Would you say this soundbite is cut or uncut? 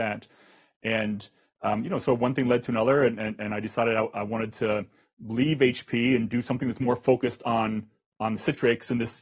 uncut